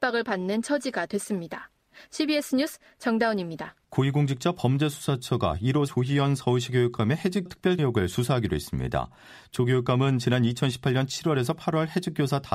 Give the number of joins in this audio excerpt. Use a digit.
4